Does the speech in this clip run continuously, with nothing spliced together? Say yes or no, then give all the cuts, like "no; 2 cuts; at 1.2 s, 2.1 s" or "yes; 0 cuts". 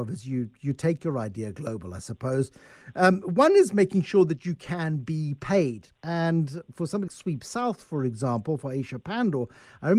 no; 2 cuts; at 6.0 s, 7.1 s